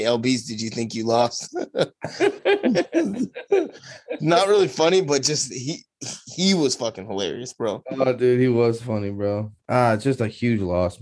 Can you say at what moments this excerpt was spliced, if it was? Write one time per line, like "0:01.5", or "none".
0:09.6